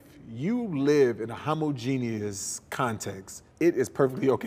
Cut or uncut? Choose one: cut